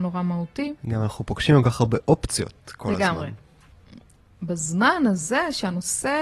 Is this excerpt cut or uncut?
uncut